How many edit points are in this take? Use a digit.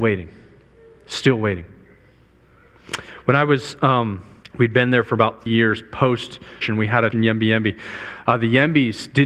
4